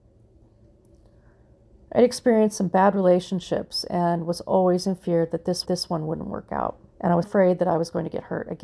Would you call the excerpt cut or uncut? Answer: cut